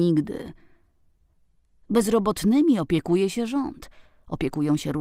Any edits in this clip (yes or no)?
no